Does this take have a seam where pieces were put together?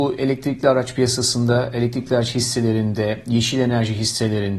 no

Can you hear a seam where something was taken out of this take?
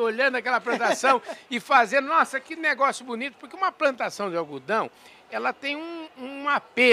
no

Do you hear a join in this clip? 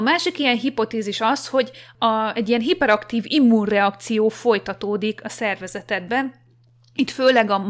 no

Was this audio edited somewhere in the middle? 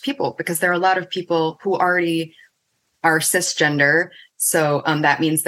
no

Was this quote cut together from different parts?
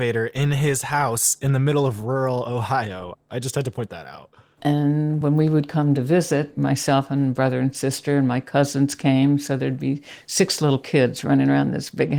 no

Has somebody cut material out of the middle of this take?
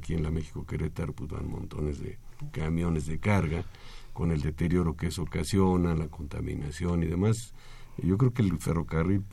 no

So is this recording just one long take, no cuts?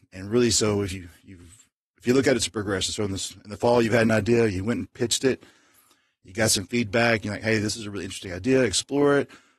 yes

